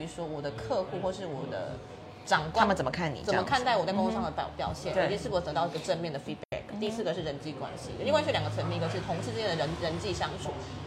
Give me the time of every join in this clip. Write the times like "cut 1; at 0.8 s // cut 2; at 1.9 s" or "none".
none

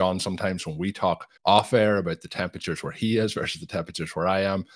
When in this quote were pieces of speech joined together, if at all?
cut 1; at 1.4 s

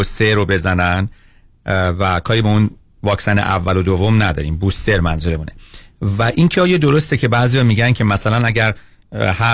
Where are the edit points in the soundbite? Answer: none

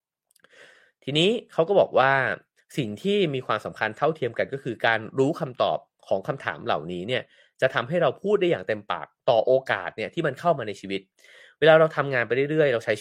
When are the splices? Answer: none

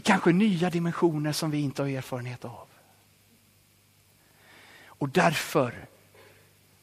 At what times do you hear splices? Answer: none

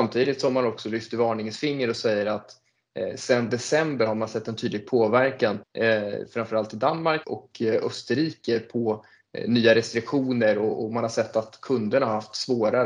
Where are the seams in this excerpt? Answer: cut 1; at 5.6 s // cut 2; at 7.2 s

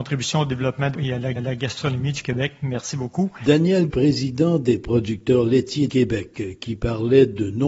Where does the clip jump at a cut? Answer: cut 1; at 0.9 s // cut 2; at 1.4 s // cut 3; at 3.9 s // cut 4; at 5.9 s

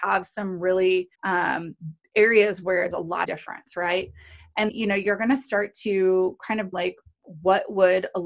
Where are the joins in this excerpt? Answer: cut 1; at 1.1 s // cut 2; at 2.9 s // cut 3; at 3.2 s // cut 4; at 4.7 s // cut 5; at 6.7 s

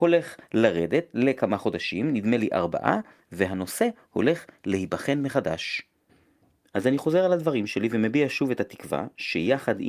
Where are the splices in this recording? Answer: none

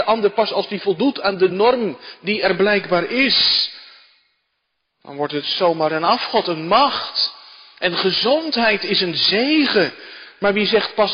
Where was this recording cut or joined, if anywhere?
none

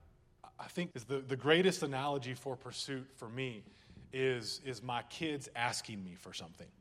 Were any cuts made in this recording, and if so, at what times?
cut 1; at 0.9 s

